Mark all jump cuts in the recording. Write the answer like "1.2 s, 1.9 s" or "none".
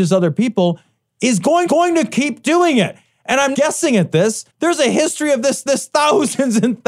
1.7 s, 3.5 s, 4.5 s, 5.7 s